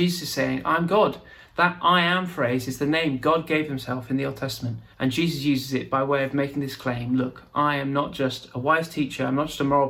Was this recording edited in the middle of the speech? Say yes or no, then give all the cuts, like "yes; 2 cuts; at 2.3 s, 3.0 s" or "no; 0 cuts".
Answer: yes; 1 cut; at 4.9 s